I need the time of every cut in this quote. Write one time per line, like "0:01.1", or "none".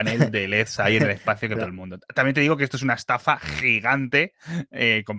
0:01.6